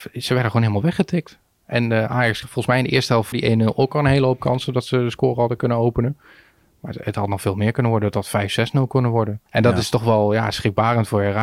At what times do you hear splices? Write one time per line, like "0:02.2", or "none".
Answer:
0:02.4
0:03.3
0:09.5